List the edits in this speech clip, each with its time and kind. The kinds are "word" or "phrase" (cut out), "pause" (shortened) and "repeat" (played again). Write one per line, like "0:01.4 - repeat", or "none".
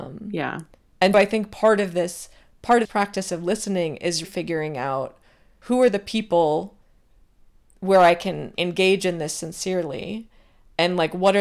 0:01.1 - word
0:02.8 - word
0:04.2 - word
0:08.5 - word

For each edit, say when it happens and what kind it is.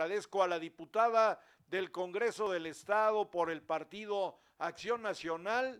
none

